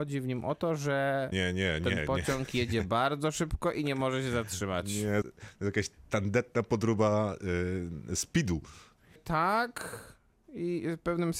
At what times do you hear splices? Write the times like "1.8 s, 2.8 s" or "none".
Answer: 1.3 s, 5.2 s